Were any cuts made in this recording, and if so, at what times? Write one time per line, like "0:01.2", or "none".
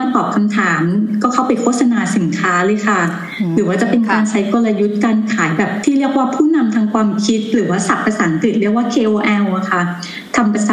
none